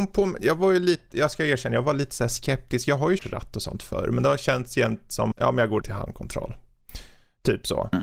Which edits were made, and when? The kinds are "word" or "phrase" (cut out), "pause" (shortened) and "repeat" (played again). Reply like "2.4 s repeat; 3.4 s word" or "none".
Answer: 3.2 s word; 5.3 s word; 5.8 s word